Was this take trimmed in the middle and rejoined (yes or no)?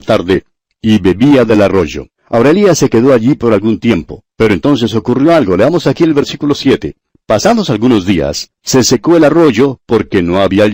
yes